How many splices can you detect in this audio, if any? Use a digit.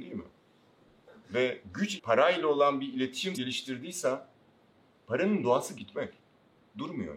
3